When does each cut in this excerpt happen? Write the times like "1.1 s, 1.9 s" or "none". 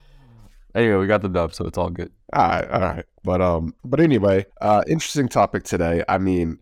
2.2 s, 3.8 s, 4.5 s